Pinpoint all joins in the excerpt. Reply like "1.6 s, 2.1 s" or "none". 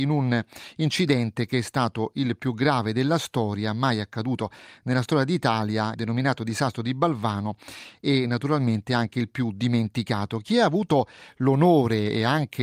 5.9 s